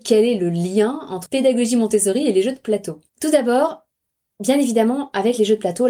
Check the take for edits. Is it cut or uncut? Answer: cut